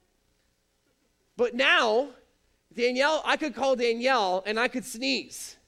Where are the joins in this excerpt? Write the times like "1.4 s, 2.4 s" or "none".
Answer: none